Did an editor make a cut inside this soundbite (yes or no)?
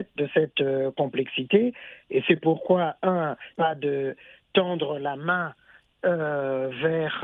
yes